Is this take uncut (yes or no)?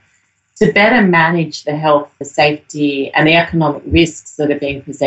no